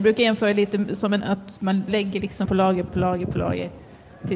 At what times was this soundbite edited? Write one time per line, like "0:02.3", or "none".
0:01.2
0:01.9
0:02.4
0:02.9